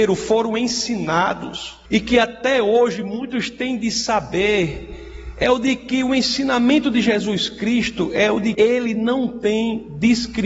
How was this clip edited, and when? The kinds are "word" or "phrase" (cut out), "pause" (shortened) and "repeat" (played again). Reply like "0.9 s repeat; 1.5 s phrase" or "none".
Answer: 1.9 s pause; 8.5 s word